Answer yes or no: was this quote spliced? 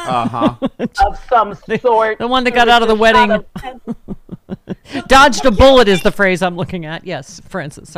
yes